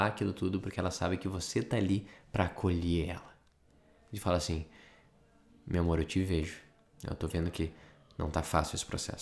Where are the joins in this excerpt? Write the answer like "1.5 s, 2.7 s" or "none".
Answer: none